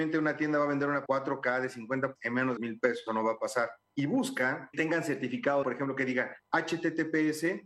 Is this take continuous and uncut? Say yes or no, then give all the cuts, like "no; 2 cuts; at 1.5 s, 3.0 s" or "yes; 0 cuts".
no; 6 cuts; at 1.1 s, 2.2 s, 2.6 s, 3.1 s, 4.7 s, 5.6 s